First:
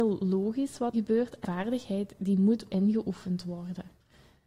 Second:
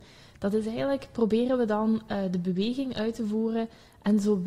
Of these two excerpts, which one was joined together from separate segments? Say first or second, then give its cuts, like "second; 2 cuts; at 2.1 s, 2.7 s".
first; 3 cuts; at 0.9 s, 1.4 s, 2.7 s